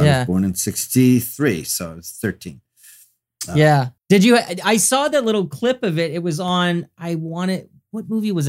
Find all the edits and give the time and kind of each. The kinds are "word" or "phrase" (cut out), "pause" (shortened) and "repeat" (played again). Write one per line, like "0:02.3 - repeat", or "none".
0:04.0 - pause